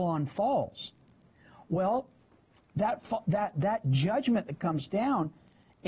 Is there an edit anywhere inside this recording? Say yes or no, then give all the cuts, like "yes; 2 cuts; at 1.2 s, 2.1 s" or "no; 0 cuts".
no; 0 cuts